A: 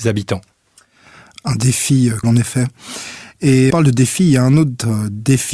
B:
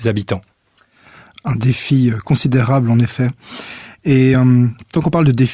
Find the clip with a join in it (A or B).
A